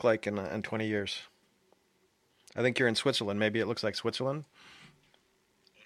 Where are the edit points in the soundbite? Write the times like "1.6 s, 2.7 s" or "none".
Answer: none